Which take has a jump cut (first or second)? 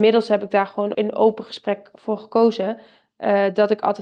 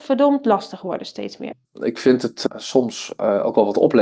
first